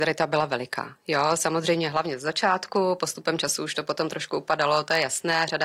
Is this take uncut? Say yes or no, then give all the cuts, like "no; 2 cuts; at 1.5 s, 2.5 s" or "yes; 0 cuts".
yes; 0 cuts